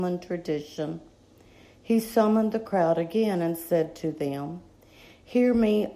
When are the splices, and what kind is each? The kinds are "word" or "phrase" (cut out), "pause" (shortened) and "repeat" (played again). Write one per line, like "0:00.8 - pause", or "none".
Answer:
none